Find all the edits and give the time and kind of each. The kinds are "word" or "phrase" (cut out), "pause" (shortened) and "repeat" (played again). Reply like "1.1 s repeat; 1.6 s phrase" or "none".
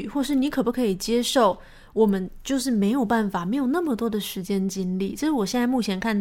none